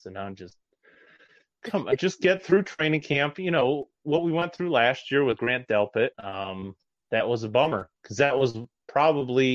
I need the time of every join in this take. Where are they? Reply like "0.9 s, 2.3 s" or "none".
6.1 s, 8.0 s